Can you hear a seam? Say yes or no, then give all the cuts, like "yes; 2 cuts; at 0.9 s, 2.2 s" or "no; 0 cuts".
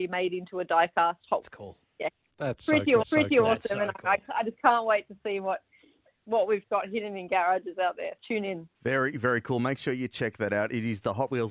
yes; 4 cuts; at 1.4 s, 3.0 s, 8.2 s, 8.8 s